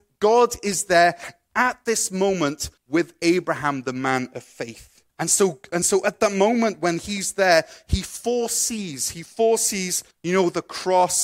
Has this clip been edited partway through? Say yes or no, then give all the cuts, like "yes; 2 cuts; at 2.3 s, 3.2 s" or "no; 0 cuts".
yes; 3 cuts; at 2.8 s, 5.1 s, 10.1 s